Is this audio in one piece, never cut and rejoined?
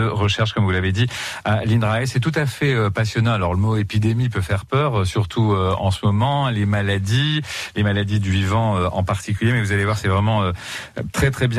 yes; 0 cuts

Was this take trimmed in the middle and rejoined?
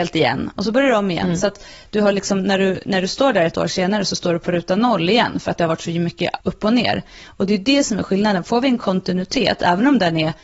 yes; 1 cut; at 6.4 s

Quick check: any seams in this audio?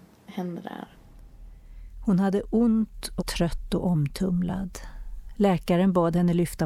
yes; 1 cut; at 3.2 s

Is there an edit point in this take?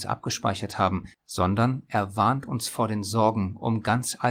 yes; 1 cut; at 1.1 s

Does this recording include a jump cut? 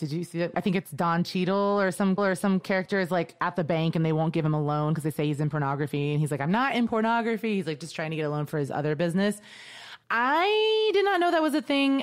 yes; 2 cuts; at 2.2 s, 10.0 s

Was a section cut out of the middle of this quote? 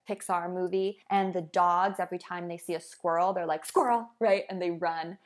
yes; 1 cut; at 1.0 s

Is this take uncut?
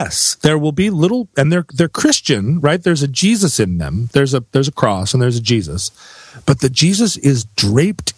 yes; 0 cuts

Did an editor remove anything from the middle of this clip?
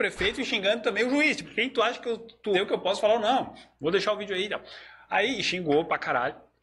yes; 2 cuts; at 1.4 s, 2.5 s

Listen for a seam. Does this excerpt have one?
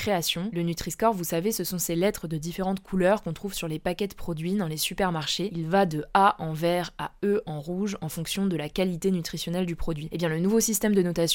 no; 0 cuts

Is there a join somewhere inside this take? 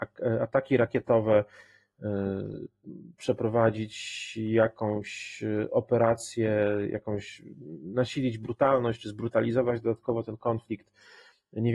no; 0 cuts

